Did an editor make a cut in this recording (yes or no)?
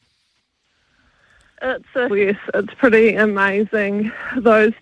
yes